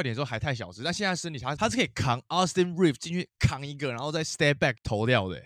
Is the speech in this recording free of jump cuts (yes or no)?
yes